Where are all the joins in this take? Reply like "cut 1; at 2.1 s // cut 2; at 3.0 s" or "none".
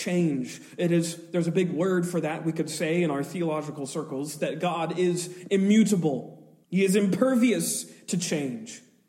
cut 1; at 6.6 s